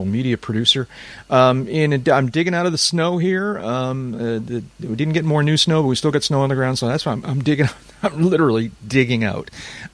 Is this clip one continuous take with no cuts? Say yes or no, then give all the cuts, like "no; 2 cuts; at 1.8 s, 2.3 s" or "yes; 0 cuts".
yes; 0 cuts